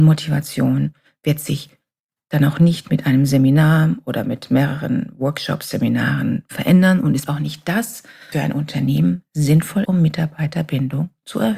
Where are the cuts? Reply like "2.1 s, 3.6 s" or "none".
7.3 s, 8.3 s, 9.8 s